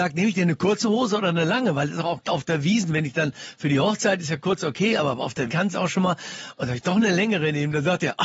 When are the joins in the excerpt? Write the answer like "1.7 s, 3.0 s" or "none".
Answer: 2.2 s, 5.5 s